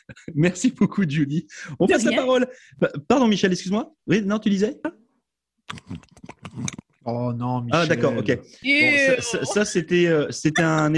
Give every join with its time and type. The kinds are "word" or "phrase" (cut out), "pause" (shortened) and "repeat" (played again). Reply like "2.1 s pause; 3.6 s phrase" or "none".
4.0 s pause